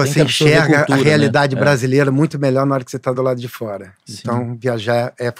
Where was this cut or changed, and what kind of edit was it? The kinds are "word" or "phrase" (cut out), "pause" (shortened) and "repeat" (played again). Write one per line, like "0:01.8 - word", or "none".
none